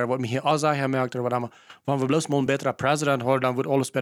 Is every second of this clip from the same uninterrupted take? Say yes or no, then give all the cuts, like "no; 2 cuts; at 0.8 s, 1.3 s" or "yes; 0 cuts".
yes; 0 cuts